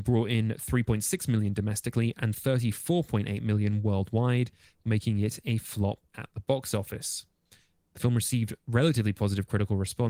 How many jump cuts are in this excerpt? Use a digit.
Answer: 0